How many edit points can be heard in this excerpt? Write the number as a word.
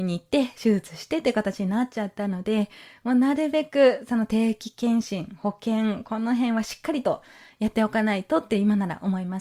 zero